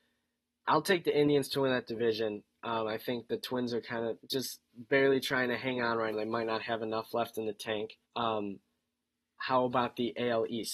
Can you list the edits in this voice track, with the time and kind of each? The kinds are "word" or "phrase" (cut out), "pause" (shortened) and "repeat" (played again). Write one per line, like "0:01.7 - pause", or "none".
0:04.2 - pause
0:06.1 - word
0:08.0 - pause